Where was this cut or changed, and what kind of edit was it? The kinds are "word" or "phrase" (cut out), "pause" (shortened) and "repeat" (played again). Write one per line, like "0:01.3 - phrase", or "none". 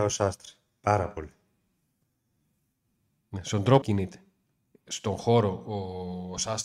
0:03.8 - phrase
0:04.7 - pause